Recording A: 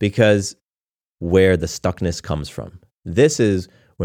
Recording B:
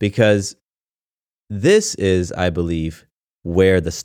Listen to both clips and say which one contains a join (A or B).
A